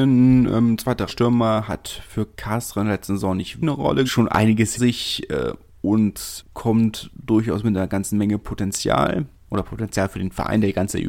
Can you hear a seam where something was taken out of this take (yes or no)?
yes